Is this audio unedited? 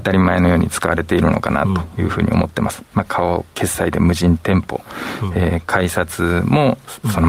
yes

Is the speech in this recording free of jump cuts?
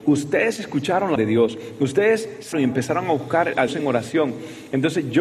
no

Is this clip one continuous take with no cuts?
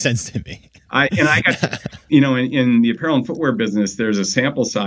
yes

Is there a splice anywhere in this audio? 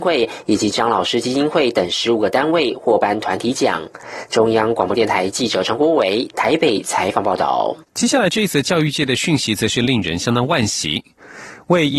yes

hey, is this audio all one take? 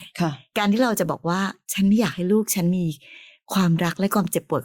yes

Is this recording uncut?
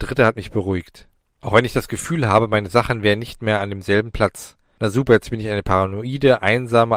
yes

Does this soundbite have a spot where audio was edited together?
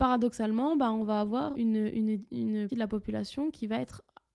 yes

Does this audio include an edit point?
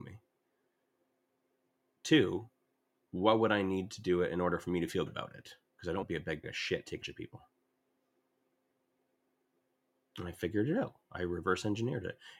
yes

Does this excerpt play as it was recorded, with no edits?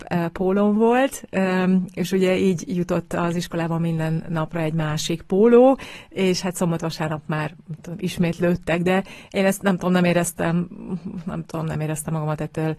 yes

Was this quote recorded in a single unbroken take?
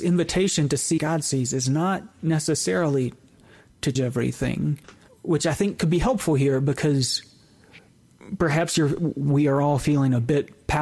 no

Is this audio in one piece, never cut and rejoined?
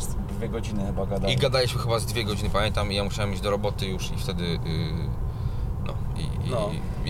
no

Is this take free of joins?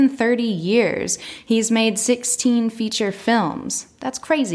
yes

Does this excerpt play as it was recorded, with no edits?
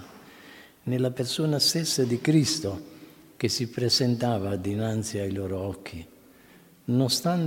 yes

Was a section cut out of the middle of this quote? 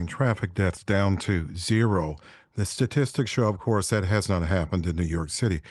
no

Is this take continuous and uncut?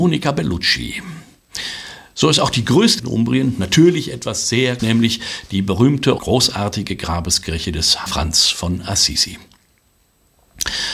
no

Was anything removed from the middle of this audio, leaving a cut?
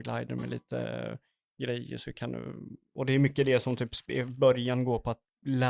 no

